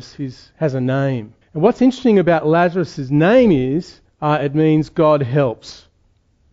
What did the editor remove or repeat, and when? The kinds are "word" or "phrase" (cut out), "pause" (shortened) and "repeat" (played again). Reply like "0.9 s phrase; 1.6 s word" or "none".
1.4 s pause; 4.0 s pause